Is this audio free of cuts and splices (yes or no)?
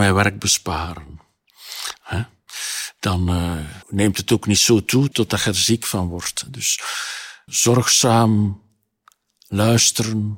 no